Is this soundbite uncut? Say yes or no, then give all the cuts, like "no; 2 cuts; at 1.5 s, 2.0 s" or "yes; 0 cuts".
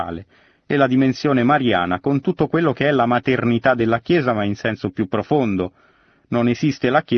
yes; 0 cuts